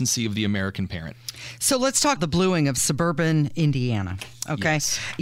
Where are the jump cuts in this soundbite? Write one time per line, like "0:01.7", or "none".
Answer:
0:02.2